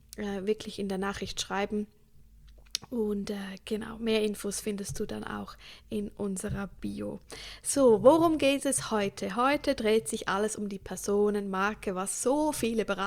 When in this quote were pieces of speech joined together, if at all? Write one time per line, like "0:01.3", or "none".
none